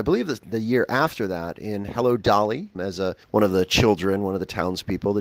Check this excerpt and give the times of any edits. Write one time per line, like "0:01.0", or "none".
0:02.7
0:03.2

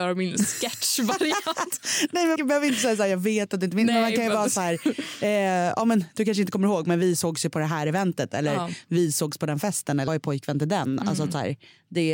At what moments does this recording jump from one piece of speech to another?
0:02.4
0:10.1

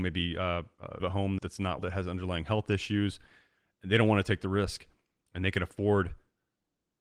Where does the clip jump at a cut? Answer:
0:01.0
0:01.4
0:01.8

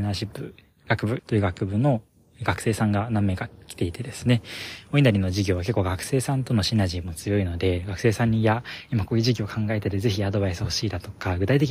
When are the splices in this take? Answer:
0:01.2

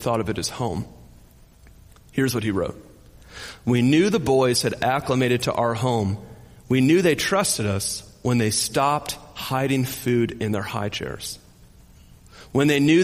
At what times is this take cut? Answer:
none

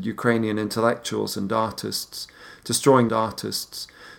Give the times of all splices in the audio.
0:03.1

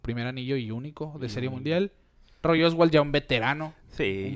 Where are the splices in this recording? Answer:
none

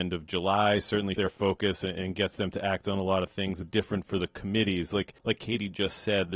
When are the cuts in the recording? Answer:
0:01.1
0:03.6
0:05.2

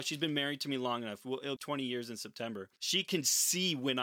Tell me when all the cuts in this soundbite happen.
0:01.6
0:02.8

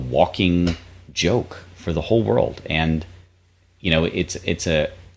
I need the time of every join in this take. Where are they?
none

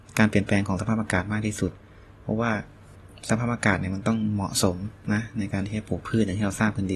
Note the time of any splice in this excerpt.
none

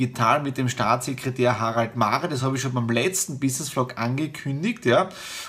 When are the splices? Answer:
none

